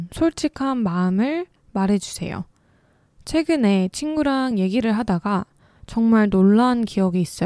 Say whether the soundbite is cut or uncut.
uncut